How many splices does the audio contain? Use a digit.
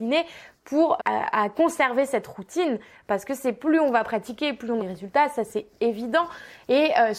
2